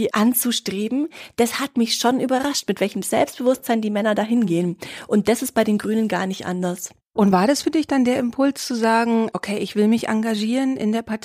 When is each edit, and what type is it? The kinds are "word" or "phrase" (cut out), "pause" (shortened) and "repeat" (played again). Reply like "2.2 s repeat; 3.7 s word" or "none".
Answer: none